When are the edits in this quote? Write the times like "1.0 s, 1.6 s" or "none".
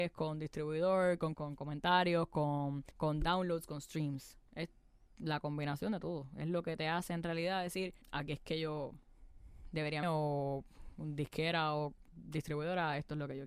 1.3 s, 2.9 s, 4.5 s, 8.0 s, 10.0 s

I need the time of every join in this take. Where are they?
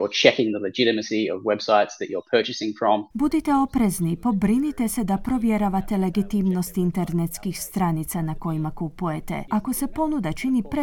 3.1 s

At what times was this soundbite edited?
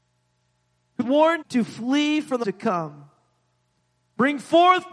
1.0 s, 1.4 s, 2.4 s

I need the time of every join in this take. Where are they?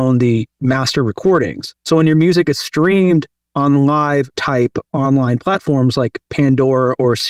1.8 s, 4.3 s

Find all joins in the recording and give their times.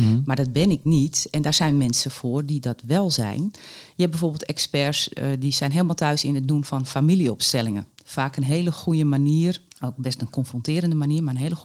9.7 s

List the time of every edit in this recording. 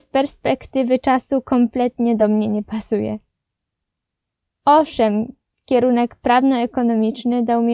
none

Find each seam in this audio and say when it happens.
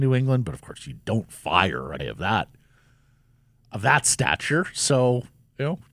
2.0 s

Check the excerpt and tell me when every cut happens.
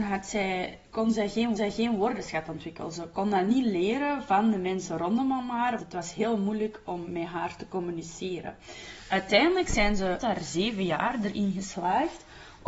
1.6 s, 5.8 s, 10.2 s

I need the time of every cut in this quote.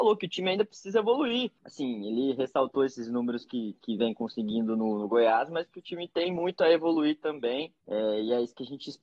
none

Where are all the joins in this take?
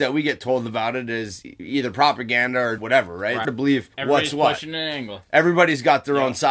2.8 s, 3.4 s, 3.9 s

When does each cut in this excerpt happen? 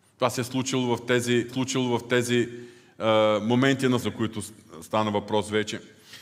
1.5 s, 4.0 s

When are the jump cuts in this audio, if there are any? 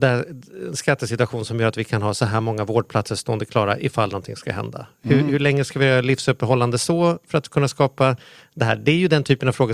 none

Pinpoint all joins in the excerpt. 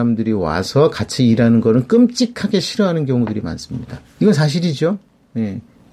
4.0 s

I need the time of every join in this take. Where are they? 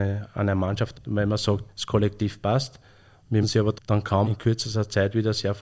0.9 s, 1.7 s, 3.4 s, 3.8 s, 4.2 s

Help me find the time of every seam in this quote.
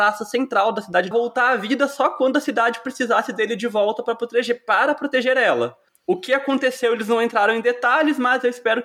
1.1 s

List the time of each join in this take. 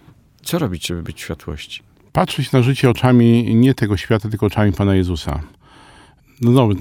none

